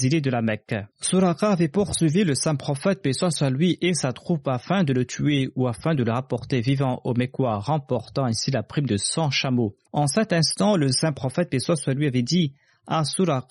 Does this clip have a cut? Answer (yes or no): yes